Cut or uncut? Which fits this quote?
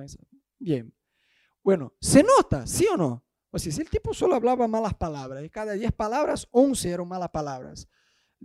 uncut